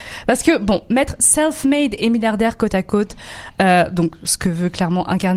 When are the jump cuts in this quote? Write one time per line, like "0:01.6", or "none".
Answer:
none